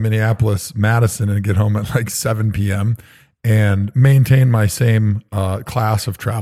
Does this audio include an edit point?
no; 0 cuts

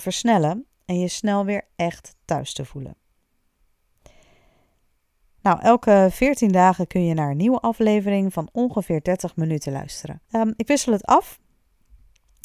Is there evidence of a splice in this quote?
yes; 1 cut; at 10.2 s

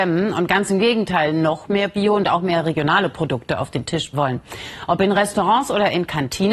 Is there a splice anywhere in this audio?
yes; 1 cut; at 4.1 s

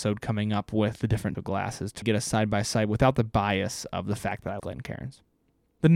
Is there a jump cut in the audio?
yes; 3 cuts; at 1.3 s, 2.0 s, 4.6 s

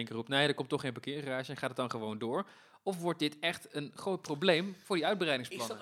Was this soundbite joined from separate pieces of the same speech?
no; 0 cuts

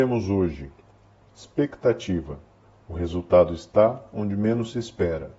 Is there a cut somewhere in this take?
yes; 1 cut; at 2.6 s

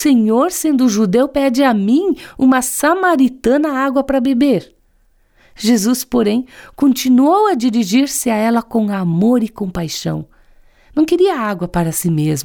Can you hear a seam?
no; 0 cuts

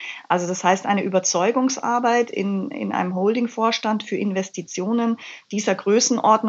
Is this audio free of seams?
yes; 0 cuts

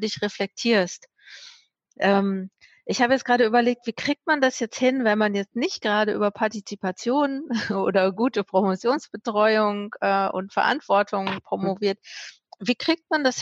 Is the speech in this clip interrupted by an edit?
no; 0 cuts

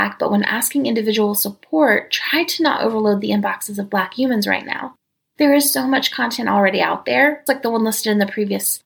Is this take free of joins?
no; 1 cut; at 7.5 s

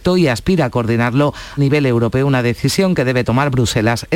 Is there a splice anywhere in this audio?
yes; 1 cut; at 1.6 s

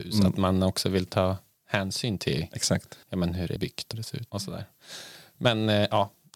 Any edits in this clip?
yes; 4 cuts; at 3.0 s, 3.6 s, 3.9 s, 4.3 s

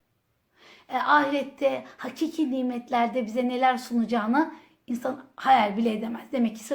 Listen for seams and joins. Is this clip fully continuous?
yes; 0 cuts

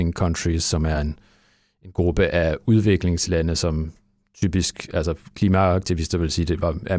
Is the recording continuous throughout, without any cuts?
yes; 0 cuts

